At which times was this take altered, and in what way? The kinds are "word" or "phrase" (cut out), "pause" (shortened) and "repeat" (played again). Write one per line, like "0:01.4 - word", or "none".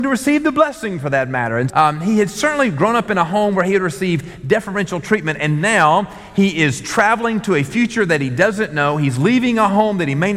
0:01.7 - word